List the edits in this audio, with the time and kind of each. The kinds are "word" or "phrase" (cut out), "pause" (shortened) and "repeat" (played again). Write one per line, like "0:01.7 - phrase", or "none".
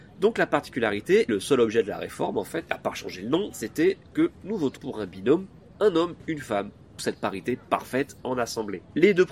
0:01.3 - word
0:04.8 - word
0:05.7 - word
0:07.0 - word